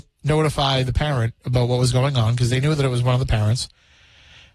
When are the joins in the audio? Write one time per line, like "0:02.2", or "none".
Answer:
none